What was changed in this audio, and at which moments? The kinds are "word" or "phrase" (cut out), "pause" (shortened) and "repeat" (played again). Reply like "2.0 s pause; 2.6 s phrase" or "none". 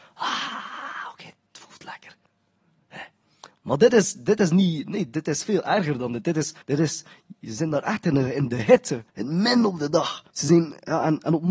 6.6 s pause; 9.1 s pause; 10.3 s pause